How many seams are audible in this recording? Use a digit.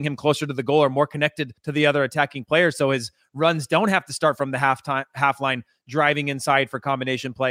1